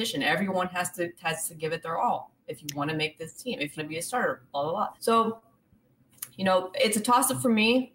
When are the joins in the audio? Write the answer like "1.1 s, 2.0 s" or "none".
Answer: 2.4 s, 3.8 s, 5.0 s